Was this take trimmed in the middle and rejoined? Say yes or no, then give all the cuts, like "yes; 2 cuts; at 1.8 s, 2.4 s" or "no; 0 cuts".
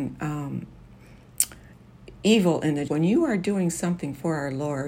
yes; 1 cut; at 2.9 s